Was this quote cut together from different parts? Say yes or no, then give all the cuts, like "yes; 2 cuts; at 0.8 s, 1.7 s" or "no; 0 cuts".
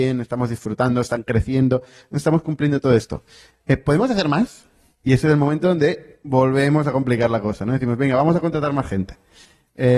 no; 0 cuts